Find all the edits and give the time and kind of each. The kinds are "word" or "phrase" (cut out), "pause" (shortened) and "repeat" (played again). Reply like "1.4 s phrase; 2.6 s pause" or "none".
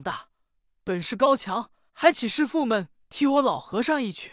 1.9 s pause